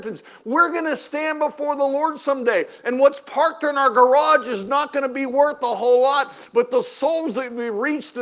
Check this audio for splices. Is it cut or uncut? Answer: uncut